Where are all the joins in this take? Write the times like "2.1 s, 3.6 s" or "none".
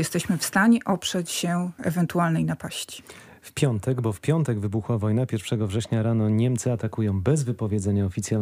1.8 s